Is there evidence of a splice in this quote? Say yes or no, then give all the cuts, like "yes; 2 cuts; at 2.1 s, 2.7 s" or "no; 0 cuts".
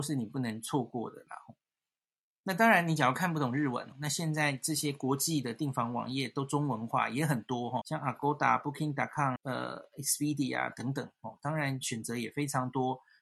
yes; 3 cuts; at 3.9 s, 7.8 s, 9.4 s